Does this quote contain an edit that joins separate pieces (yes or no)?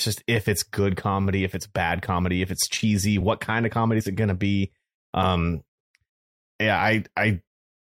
no